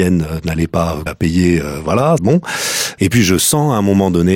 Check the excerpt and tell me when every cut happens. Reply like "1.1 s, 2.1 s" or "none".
1.1 s, 2.2 s